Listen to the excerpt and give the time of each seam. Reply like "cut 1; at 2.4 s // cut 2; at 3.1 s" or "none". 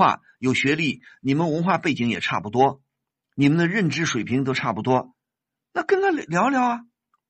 none